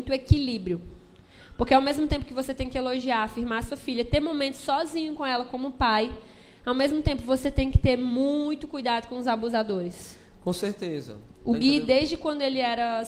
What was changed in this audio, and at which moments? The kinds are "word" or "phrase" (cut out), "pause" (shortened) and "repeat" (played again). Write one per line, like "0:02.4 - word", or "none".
none